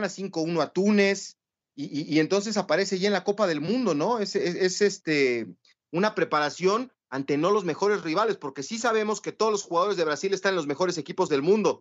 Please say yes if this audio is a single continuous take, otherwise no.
yes